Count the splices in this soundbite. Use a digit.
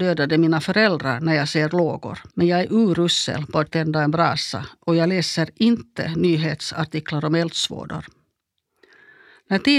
2